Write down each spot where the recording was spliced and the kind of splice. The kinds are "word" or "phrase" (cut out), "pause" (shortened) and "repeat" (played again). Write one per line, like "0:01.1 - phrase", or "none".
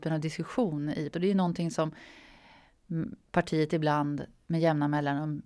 0:01.1 - word

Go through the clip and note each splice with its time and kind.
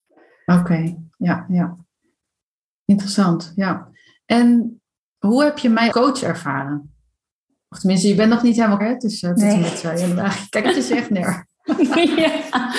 0:01.1 - word
0:05.9 - word
0:08.8 - word
0:10.6 - word

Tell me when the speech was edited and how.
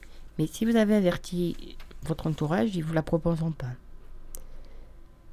none

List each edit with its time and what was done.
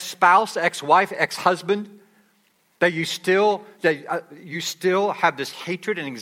none

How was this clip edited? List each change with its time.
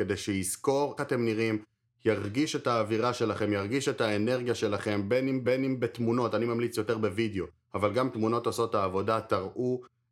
0:01.0 - word
0:05.4 - repeat

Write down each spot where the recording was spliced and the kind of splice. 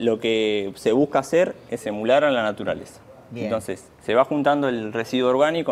0:03.9 - pause

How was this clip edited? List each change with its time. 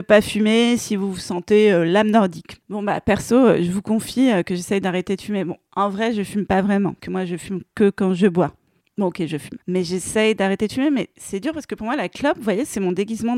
0:02.6 - pause
0:07.0 - word
0:08.8 - pause
0:09.6 - pause

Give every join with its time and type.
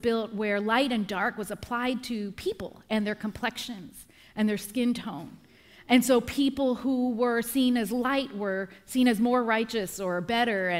none

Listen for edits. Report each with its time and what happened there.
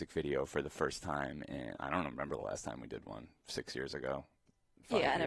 none

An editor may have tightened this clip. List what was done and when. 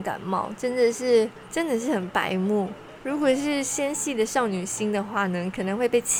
none

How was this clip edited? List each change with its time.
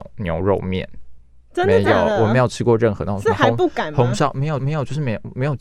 0:04.6 - repeat

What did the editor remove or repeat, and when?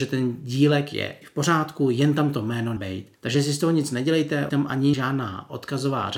0:01.2 - word
0:02.8 - word
0:03.1 - pause
0:04.5 - phrase
0:04.9 - word

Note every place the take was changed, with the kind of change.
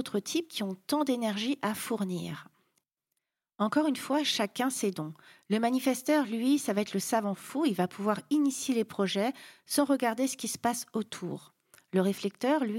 none

